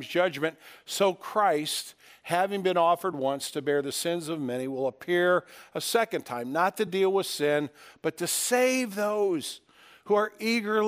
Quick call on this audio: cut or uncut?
uncut